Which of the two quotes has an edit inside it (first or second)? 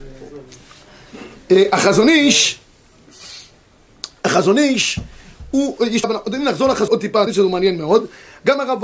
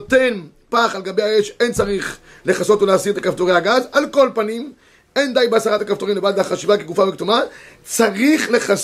first